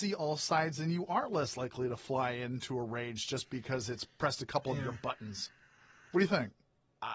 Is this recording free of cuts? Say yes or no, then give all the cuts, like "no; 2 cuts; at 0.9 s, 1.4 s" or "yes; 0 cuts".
yes; 0 cuts